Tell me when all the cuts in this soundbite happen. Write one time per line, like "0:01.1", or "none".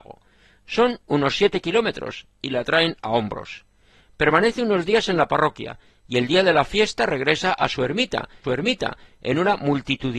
0:08.4